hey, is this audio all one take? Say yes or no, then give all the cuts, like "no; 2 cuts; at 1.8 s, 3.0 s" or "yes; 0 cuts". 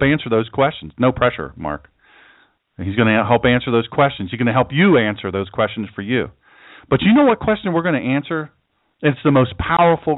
yes; 0 cuts